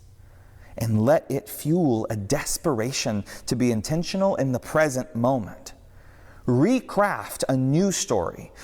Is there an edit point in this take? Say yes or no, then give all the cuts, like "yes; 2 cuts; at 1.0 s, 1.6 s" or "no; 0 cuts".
no; 0 cuts